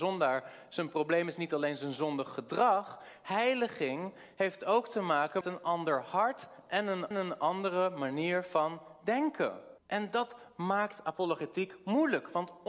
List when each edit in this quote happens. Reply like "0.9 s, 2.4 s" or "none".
5.4 s, 7.1 s, 9.8 s